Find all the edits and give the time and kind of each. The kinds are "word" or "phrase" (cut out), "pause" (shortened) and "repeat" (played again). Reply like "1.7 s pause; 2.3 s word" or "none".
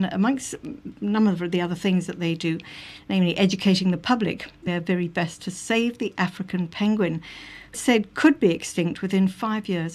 4.7 s phrase; 7.7 s word